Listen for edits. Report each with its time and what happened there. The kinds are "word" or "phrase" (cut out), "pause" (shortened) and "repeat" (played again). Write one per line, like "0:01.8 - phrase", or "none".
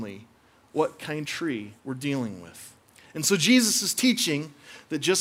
0:01.2 - word
0:01.8 - pause
0:02.9 - pause

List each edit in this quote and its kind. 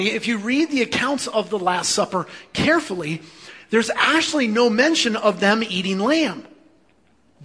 none

